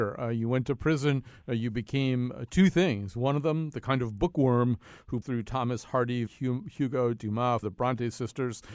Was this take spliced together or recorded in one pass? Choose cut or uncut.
cut